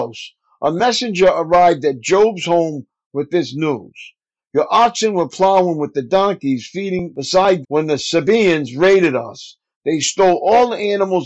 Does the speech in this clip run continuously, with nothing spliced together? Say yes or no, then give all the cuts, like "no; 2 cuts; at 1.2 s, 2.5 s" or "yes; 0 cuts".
no; 1 cut; at 7.6 s